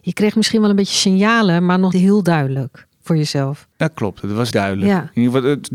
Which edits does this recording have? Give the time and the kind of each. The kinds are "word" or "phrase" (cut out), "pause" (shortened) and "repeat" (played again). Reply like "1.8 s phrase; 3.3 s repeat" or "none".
1.9 s word; 3.7 s pause; 4.5 s word